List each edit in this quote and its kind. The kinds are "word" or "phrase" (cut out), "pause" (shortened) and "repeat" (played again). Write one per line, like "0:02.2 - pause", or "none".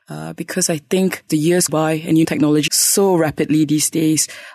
0:01.3 - word
0:01.7 - word
0:02.2 - word
0:02.7 - word